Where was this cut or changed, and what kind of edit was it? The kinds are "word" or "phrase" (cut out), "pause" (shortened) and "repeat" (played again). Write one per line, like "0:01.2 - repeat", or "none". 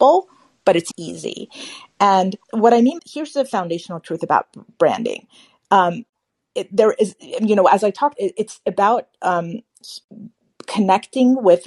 0:00.9 - word
0:02.4 - pause
0:03.0 - phrase
0:06.3 - pause
0:08.1 - word